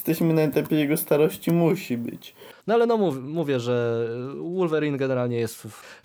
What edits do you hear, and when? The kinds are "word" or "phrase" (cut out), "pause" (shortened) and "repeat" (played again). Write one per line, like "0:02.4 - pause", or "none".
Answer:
0:02.6 - pause